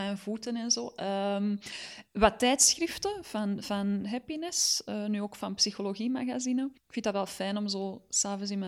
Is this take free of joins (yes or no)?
no